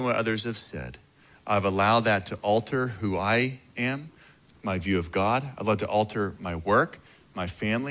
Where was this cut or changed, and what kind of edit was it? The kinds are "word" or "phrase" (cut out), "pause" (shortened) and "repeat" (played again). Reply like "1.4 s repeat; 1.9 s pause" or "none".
none